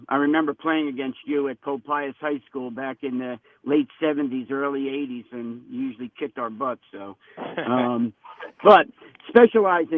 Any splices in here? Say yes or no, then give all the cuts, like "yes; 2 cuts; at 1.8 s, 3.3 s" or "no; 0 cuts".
no; 0 cuts